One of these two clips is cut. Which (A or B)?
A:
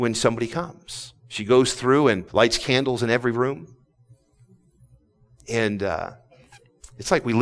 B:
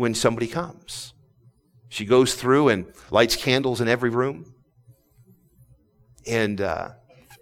A